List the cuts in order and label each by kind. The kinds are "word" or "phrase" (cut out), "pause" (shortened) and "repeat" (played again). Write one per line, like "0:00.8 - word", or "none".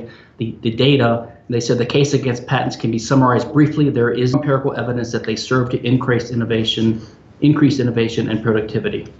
0:04.3 - word